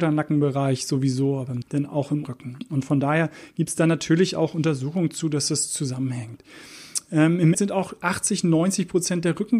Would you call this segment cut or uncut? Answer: cut